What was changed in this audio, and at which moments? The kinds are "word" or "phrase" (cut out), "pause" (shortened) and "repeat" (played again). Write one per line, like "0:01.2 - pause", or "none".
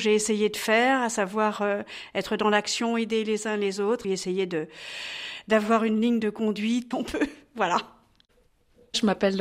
0:04.0 - phrase
0:06.9 - phrase